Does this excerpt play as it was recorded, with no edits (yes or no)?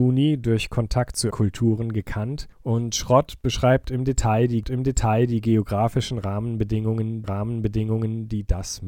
no